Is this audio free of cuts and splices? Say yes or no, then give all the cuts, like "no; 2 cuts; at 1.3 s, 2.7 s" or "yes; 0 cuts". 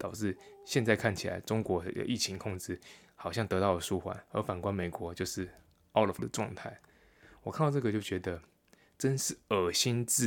no; 1 cut; at 6.2 s